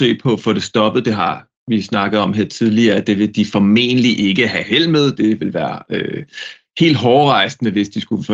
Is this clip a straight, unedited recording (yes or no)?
yes